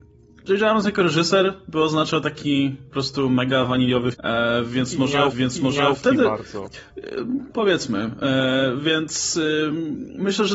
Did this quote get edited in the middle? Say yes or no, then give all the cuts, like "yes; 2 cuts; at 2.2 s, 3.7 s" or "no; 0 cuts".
yes; 3 cuts; at 4.1 s, 5.3 s, 7.5 s